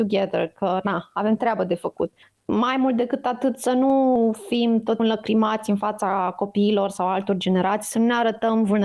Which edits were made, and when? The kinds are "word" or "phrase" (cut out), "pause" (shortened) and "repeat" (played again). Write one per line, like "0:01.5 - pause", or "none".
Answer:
0:05.0 - word